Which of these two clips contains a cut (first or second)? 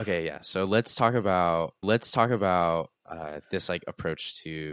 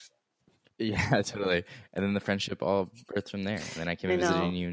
first